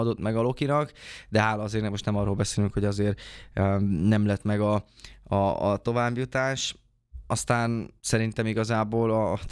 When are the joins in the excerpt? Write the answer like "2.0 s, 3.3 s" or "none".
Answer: 8.0 s